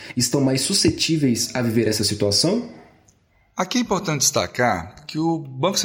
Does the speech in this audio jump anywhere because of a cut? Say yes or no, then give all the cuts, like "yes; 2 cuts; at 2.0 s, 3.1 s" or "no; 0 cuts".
no; 0 cuts